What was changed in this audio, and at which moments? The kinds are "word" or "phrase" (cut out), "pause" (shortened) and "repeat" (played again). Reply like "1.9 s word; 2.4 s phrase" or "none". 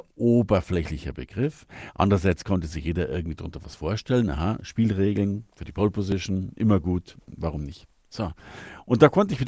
none

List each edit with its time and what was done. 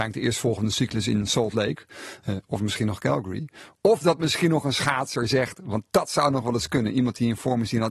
none

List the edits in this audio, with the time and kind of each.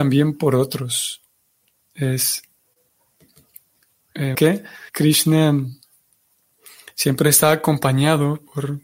1.7 s pause; 4.3 s phrase; 4.9 s pause

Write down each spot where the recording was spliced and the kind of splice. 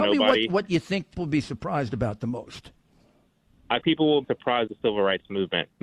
1.2 s word; 3.8 s word; 4.2 s word; 4.7 s word

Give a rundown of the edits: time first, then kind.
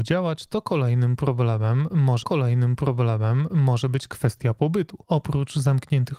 2.2 s repeat; 5.0 s pause

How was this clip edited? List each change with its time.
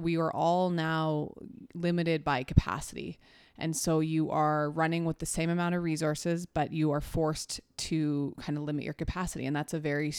none

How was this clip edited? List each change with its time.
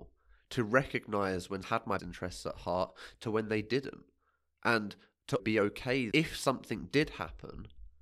1.6 s word; 2.0 s word; 5.4 s word; 6.1 s word

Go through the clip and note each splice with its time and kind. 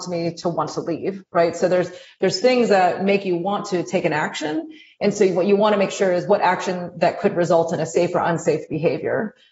none

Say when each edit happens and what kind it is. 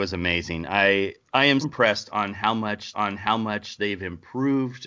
1.2 s pause; 1.6 s word; 2.9 s repeat

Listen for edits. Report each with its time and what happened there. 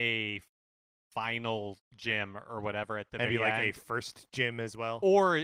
3.3 s word

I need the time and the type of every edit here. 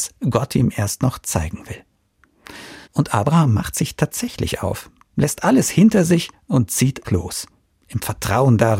2.8 s pause; 7.0 s word

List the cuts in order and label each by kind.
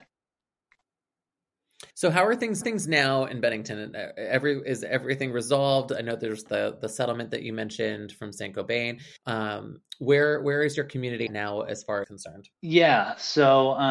1.9 s pause; 2.6 s repeat; 9.2 s pause; 11.3 s word; 12.0 s phrase; 12.5 s pause

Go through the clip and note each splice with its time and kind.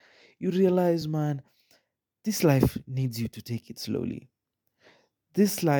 none

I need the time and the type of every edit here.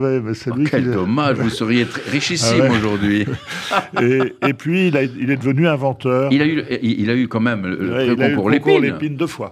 none

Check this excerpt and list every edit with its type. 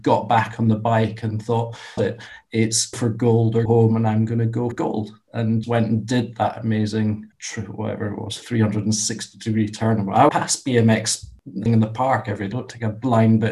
2.0 s word; 2.9 s word; 3.7 s word; 4.7 s word; 5.6 s word; 7.3 s word; 10.3 s word; 11.7 s word; 12.5 s word

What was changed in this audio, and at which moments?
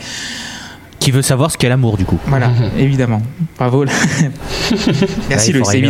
none

